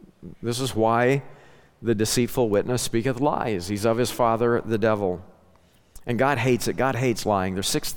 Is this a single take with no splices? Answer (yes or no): yes